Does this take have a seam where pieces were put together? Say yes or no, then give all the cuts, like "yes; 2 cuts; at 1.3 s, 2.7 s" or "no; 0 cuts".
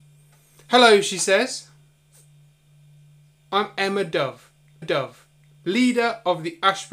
yes; 1 cut; at 4.8 s